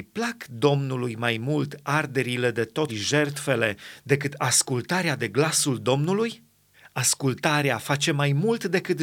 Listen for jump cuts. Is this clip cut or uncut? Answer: cut